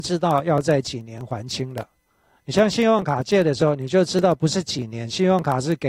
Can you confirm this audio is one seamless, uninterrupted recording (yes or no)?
yes